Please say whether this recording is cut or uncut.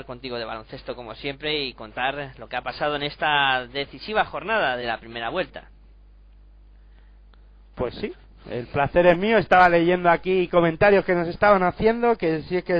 cut